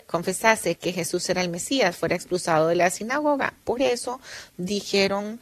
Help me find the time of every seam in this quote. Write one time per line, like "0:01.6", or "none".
none